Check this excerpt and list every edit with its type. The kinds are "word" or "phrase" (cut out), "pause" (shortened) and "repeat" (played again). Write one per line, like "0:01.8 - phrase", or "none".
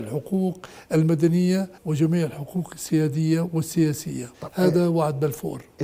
0:01.8 - pause
0:04.3 - pause